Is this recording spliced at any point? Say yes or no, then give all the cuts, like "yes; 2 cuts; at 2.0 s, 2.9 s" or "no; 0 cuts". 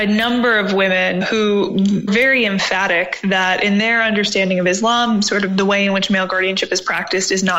yes; 2 cuts; at 1.2 s, 2.1 s